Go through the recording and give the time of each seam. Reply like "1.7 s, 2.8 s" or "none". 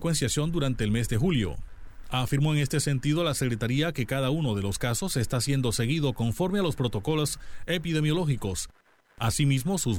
none